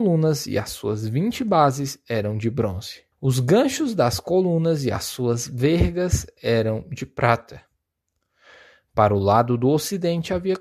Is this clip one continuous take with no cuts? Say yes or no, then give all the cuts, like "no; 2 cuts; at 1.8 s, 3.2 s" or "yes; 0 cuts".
no; 1 cut; at 3.1 s